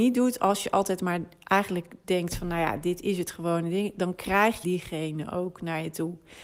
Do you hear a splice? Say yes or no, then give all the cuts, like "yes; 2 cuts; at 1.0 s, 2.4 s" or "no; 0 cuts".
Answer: yes; 1 cut; at 4.6 s